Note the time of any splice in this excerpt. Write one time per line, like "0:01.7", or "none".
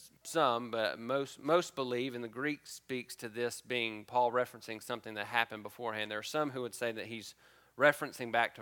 none